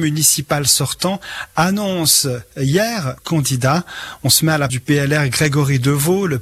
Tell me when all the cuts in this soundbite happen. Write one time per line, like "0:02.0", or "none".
0:03.2
0:04.7